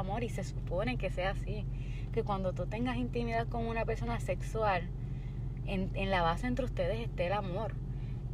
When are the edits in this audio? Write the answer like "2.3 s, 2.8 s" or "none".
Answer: none